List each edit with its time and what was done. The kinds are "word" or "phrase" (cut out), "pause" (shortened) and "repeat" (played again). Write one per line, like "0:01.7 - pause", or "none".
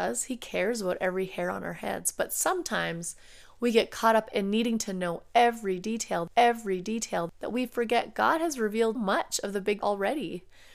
0:06.3 - repeat
0:08.9 - word
0:09.8 - word